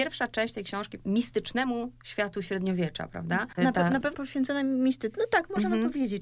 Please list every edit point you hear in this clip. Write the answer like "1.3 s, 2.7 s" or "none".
1.0 s, 3.6 s, 4.1 s